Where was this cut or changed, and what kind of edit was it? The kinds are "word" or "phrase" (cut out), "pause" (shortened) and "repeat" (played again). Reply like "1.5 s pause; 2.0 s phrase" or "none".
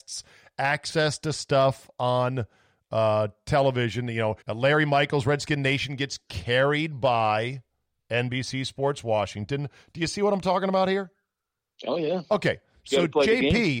4.4 s pause